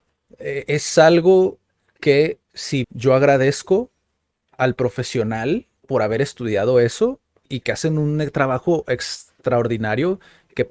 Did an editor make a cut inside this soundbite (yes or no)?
yes